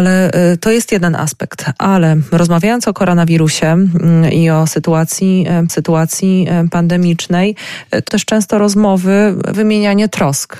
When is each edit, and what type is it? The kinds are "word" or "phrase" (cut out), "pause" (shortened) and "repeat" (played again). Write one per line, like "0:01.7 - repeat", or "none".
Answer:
0:05.7 - repeat
0:08.1 - word
0:09.5 - word